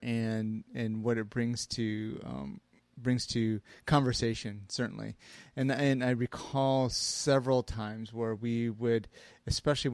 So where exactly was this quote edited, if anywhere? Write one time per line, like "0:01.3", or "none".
none